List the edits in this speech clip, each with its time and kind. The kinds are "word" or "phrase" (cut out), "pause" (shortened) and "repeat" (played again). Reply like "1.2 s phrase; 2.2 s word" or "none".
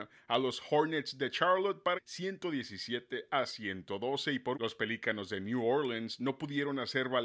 2.0 s phrase; 4.5 s word